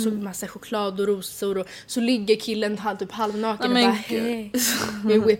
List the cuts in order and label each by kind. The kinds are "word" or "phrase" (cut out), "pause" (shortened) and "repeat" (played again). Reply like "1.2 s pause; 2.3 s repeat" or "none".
none